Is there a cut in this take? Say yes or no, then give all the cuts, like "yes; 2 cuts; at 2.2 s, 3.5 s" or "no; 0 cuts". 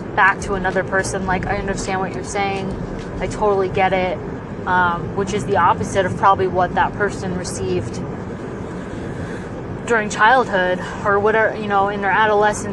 no; 0 cuts